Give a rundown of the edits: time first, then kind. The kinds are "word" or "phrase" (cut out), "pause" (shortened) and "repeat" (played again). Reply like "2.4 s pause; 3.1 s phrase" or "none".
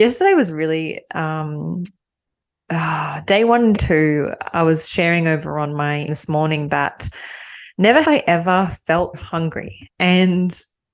1.1 s word; 3.8 s word; 6.1 s word; 8.0 s word; 9.1 s word